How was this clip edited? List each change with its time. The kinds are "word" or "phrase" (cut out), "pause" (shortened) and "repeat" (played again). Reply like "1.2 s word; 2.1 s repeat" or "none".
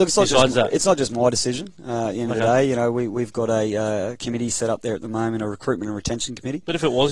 none